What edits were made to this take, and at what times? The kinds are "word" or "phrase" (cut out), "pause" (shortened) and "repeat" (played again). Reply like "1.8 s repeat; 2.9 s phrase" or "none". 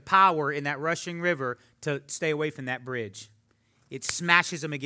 none